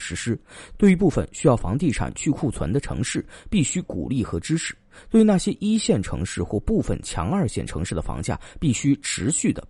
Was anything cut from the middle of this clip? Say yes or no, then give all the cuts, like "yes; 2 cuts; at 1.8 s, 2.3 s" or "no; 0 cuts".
no; 0 cuts